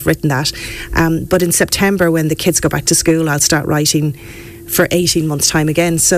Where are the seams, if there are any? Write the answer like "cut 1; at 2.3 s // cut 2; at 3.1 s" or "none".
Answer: none